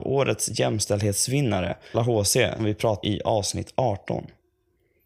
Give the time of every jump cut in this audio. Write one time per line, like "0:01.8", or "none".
0:01.9
0:02.6
0:03.0